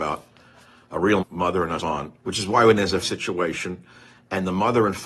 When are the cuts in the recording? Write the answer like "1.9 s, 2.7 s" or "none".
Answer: 1.2 s, 1.8 s, 2.2 s, 3.0 s